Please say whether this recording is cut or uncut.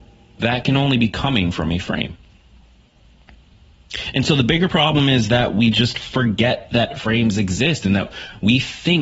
uncut